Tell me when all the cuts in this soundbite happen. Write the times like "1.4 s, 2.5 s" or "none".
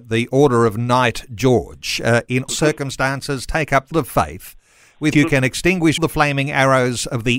2.5 s, 3.9 s, 5.1 s, 6.0 s